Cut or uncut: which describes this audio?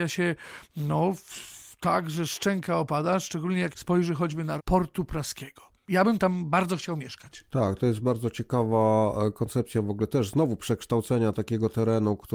cut